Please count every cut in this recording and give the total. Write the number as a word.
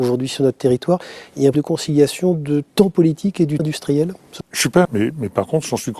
five